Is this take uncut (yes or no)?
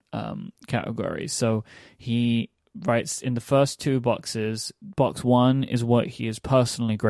yes